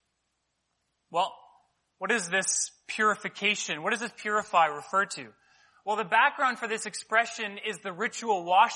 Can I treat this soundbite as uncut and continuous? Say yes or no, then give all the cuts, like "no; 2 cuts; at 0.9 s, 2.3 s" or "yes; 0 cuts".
yes; 0 cuts